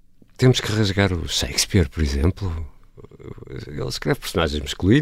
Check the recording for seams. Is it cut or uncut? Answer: uncut